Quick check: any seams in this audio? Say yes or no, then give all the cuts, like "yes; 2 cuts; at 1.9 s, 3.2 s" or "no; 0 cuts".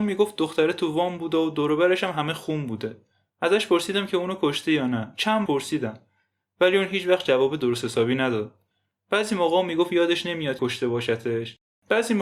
yes; 2 cuts; at 5.5 s, 10.6 s